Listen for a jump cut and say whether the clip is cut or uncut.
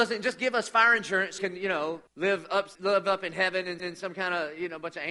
cut